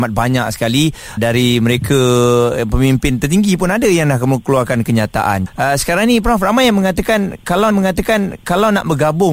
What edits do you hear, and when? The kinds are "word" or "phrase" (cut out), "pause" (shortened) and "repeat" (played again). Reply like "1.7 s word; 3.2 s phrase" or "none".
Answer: 1.2 s word; 5.5 s word; 7.7 s repeat